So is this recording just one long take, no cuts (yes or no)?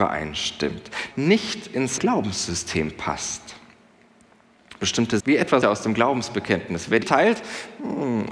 no